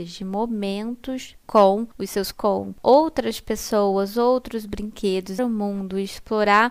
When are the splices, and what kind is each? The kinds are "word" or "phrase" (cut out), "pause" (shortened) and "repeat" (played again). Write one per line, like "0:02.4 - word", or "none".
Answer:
0:02.3 - word
0:05.4 - word